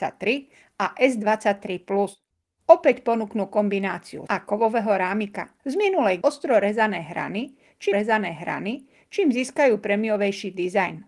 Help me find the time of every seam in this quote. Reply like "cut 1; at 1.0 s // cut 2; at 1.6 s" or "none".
cut 1; at 4.3 s // cut 2; at 5.6 s // cut 3; at 6.2 s // cut 4; at 7.9 s